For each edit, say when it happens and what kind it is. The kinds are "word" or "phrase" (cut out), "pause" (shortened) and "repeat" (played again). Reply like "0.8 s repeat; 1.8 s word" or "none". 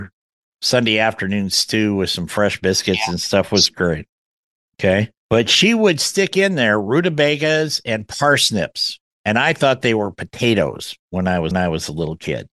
5.2 s pause; 11.5 s repeat